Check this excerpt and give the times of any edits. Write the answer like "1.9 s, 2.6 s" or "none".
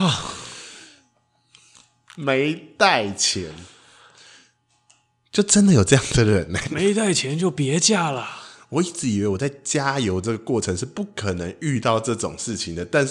6.6 s